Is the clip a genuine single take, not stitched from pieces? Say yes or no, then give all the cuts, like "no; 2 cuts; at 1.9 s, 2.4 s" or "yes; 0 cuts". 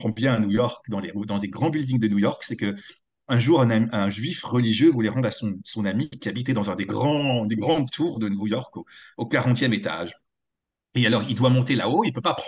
yes; 0 cuts